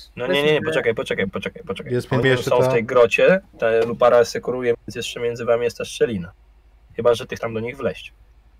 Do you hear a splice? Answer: yes; 5 cuts; at 1.3 s, 2.2 s, 3.5 s, 4.7 s, 7.4 s

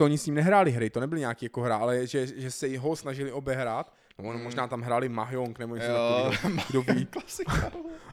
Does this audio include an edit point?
no; 0 cuts

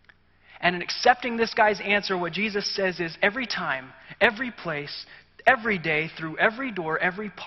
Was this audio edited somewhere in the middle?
no; 0 cuts

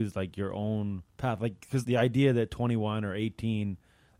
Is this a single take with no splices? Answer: no; 2 cuts; at 1.1 s, 1.8 s

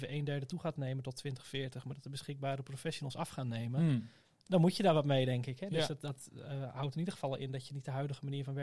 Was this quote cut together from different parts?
no; 0 cuts

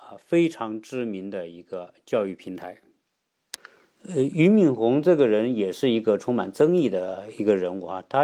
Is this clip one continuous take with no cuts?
yes; 0 cuts

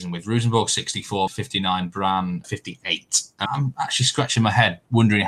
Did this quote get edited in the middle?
yes; 3 cuts; at 1.3 s, 2.4 s, 3.5 s

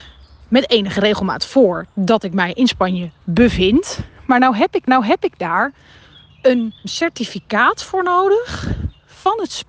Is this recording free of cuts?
no; 1 cut; at 4.9 s

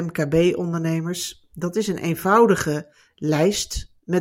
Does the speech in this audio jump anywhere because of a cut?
no; 0 cuts

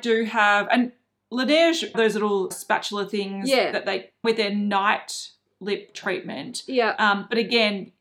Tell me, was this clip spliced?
yes; 3 cuts; at 1.9 s, 2.5 s, 4.2 s

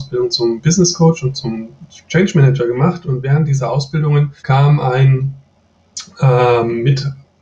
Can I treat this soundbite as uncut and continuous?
no; 1 cut; at 4.4 s

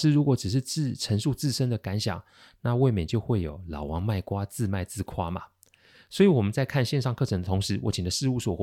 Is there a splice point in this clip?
no; 0 cuts

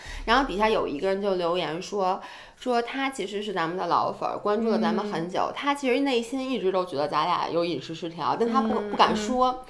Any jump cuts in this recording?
no; 0 cuts

